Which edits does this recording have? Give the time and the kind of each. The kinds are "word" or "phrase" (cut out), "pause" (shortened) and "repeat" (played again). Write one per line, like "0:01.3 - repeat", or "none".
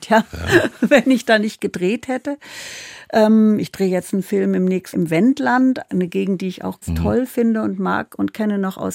0:04.9 - word
0:05.9 - word
0:06.8 - word